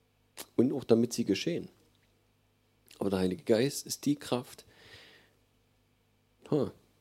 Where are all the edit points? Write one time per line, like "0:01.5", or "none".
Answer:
none